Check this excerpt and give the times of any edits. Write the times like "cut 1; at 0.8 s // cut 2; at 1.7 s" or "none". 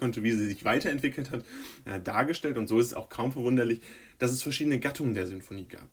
none

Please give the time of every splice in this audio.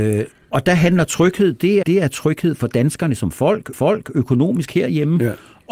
cut 1; at 1.8 s // cut 2; at 3.7 s

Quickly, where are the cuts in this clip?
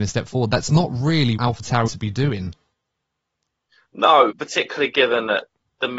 cut 1; at 1.4 s // cut 2; at 1.9 s // cut 3; at 4.3 s

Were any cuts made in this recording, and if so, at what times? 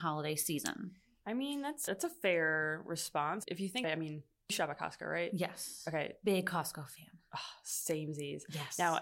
cut 1; at 1.9 s // cut 2; at 3.4 s // cut 3; at 3.8 s // cut 4; at 4.5 s

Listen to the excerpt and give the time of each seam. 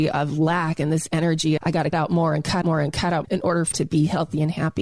cut 1; at 1.6 s // cut 2; at 1.9 s // cut 3; at 2.6 s // cut 4; at 3.2 s // cut 5; at 3.7 s

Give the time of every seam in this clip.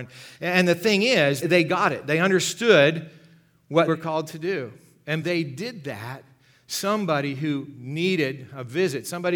cut 1; at 1.4 s // cut 2; at 3.9 s // cut 3; at 5.2 s

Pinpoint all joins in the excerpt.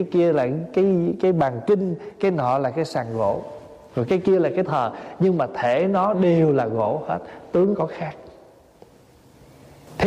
cut 1; at 4.6 s // cut 2; at 7.7 s

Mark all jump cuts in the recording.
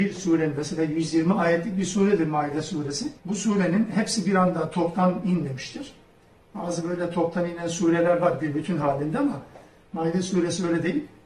cut 1; at 3.2 s

